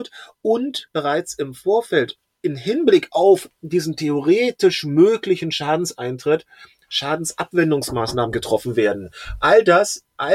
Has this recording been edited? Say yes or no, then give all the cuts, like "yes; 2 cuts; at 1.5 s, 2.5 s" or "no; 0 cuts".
no; 0 cuts